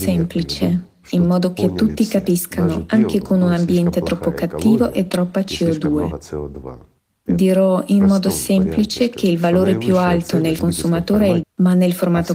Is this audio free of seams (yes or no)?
no